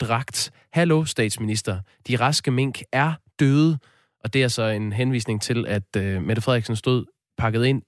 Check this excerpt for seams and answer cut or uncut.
uncut